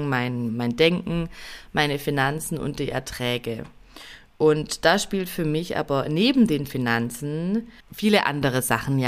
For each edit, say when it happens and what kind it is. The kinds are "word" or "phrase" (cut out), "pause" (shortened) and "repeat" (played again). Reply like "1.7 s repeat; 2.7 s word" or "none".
7.8 s pause